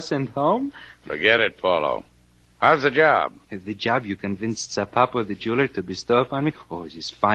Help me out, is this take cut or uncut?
uncut